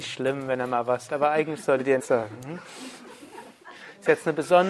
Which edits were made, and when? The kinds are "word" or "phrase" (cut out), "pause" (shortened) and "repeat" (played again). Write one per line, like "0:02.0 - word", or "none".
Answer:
0:01.1 - word
0:02.0 - word